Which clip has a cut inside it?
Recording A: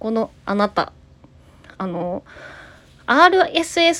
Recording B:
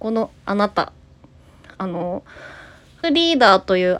B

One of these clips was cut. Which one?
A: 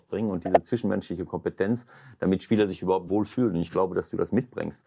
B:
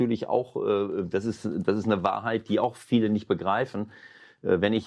A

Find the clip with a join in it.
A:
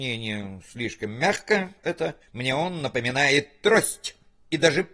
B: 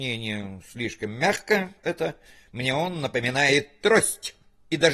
A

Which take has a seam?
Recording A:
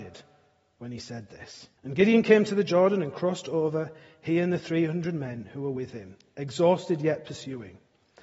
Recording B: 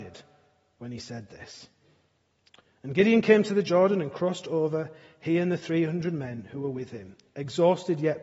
A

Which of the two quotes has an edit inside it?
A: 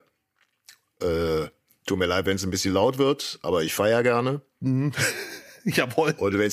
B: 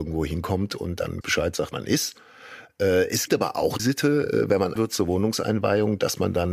B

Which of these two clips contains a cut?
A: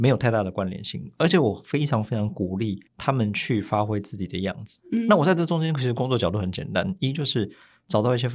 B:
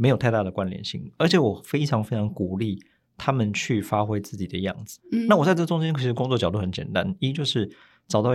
A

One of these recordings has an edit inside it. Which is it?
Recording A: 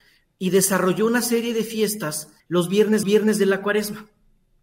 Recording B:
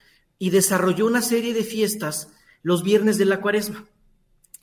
A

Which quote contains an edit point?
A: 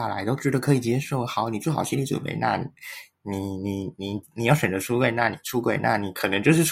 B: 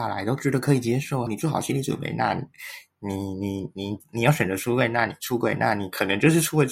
B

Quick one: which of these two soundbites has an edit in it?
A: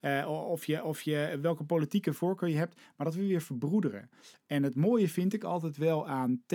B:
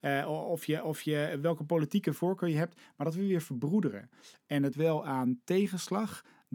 B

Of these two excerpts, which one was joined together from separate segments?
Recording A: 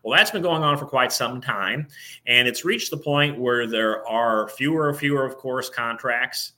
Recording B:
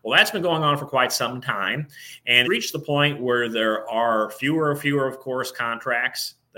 B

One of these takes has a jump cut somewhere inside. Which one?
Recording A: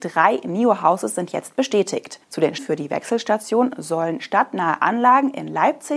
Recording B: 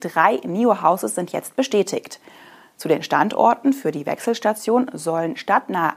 A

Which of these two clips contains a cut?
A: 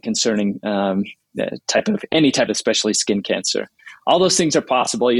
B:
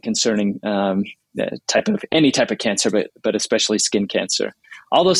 A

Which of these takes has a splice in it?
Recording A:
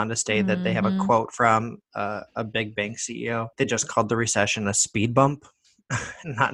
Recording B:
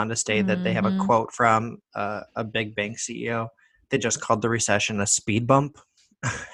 A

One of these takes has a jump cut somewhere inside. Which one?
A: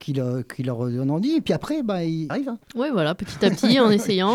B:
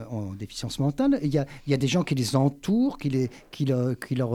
A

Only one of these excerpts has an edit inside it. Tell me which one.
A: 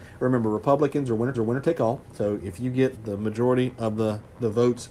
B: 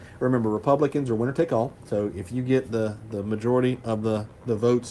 A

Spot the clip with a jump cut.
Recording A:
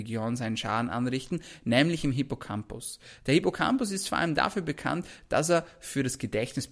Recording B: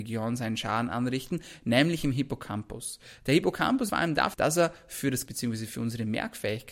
B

